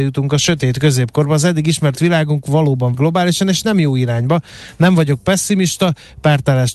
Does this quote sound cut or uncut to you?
cut